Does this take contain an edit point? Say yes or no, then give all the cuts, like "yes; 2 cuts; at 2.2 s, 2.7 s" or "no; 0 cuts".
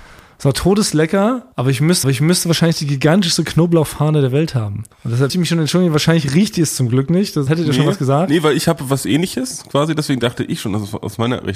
yes; 5 cuts; at 1.5 s, 2.0 s, 4.9 s, 5.3 s, 7.5 s